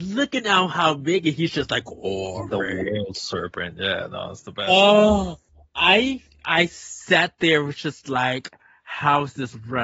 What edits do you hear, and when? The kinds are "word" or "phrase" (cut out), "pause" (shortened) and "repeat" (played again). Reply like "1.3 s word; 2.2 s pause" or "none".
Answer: none